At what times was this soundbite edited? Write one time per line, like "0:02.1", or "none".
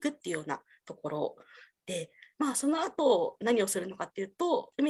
none